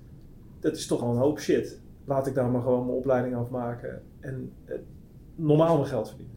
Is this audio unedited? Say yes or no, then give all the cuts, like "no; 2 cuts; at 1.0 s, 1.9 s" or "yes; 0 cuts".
no; 1 cut; at 1.0 s